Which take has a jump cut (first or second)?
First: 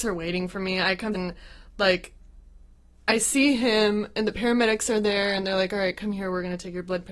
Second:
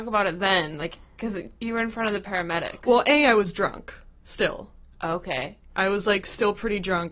first